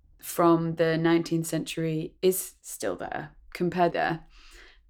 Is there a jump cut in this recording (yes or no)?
yes